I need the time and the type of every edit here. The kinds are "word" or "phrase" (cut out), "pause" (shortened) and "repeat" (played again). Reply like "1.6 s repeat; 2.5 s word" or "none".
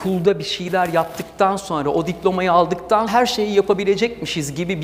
3.1 s word